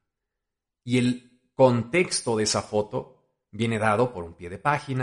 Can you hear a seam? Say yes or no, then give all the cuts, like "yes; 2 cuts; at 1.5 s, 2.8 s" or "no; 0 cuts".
no; 0 cuts